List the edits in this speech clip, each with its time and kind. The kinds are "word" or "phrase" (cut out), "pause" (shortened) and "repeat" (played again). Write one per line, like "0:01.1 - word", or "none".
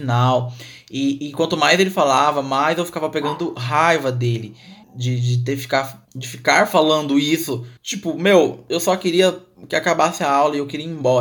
0:04.8 - pause
0:06.0 - pause
0:07.8 - pause